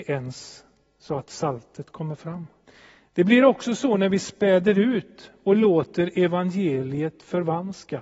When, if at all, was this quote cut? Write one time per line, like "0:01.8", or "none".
0:02.7